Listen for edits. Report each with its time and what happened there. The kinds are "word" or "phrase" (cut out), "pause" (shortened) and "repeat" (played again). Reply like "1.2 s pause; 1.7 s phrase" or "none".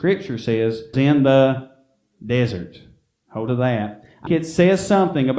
0.9 s word; 3.5 s word; 4.3 s word